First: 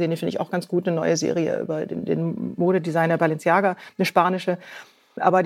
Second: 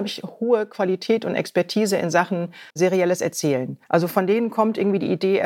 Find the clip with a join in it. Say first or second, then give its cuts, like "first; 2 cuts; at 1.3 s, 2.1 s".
second; 2 cuts; at 2.7 s, 3.8 s